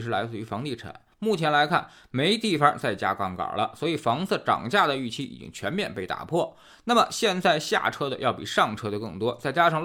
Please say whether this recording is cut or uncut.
uncut